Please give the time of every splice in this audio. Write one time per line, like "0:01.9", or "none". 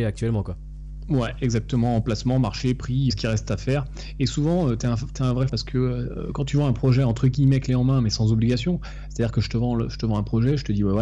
0:03.1
0:05.5